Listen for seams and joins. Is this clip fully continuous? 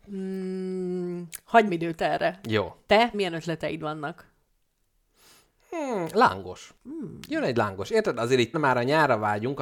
no; 4 cuts; at 1.7 s, 3.1 s, 6.8 s, 8.5 s

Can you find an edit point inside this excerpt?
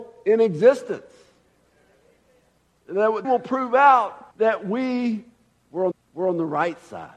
yes; 3 cuts; at 3.2 s, 4.3 s, 5.9 s

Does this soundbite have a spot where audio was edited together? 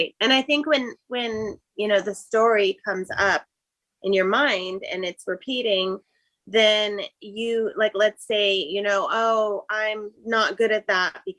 yes; 2 cuts; at 1.7 s, 10.2 s

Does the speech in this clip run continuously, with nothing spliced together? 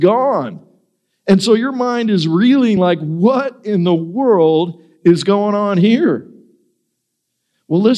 yes; 0 cuts

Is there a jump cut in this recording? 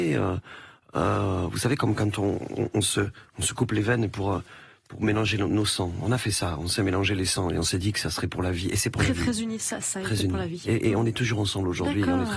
no; 0 cuts

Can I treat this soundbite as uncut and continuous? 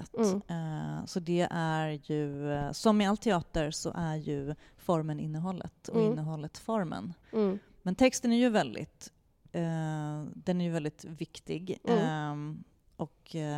yes; 0 cuts

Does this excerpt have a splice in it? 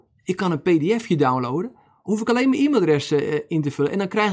no; 0 cuts

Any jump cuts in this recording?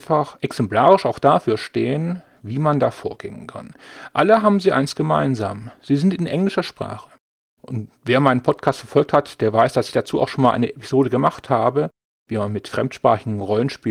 no; 0 cuts

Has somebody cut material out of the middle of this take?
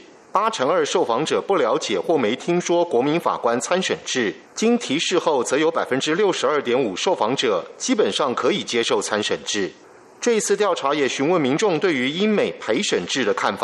yes; 1 cut; at 4.5 s

